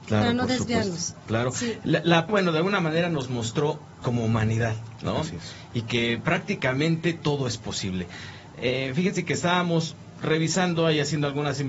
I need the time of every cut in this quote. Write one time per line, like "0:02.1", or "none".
0:02.3
0:04.0